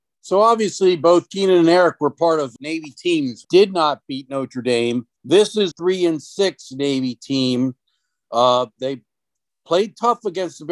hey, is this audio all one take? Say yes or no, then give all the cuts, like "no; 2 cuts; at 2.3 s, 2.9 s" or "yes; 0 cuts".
no; 4 cuts; at 2.6 s, 3.4 s, 5.2 s, 5.7 s